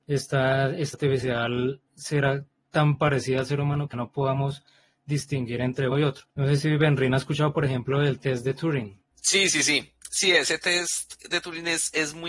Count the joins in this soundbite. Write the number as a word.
six